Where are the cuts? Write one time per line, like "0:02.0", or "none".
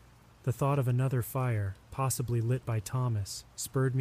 none

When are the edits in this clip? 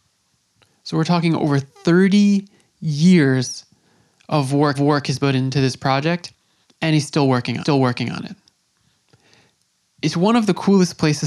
0:04.7
0:06.6
0:07.6

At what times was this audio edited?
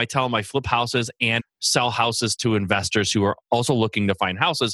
0:01.4

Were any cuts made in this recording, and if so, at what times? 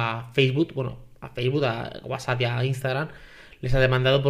none

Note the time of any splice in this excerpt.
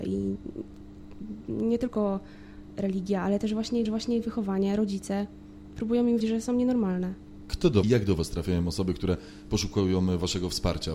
0:03.9
0:06.2
0:07.8

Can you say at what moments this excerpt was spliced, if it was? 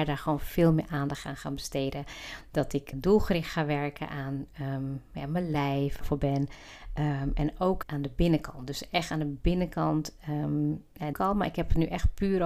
0:02.9
0:06.0
0:07.8
0:11.1

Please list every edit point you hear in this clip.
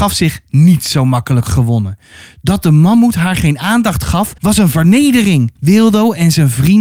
0:04.4
0:05.6

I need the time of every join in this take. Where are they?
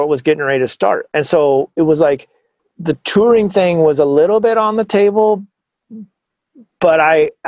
0:02.6

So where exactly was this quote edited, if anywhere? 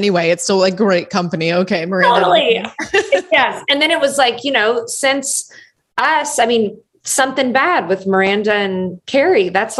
none

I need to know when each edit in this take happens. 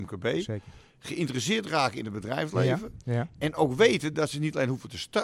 none

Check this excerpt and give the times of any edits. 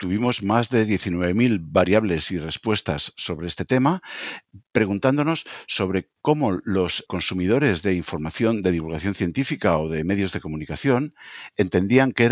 0:04.7
0:07.1

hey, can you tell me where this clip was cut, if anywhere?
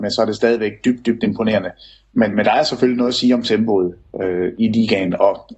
none

